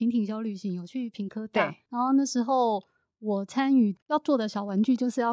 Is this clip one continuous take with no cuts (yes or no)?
yes